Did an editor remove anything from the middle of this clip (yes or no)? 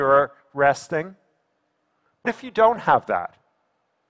yes